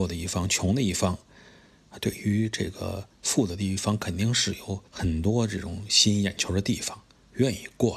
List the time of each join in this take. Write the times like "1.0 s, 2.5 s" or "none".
4.9 s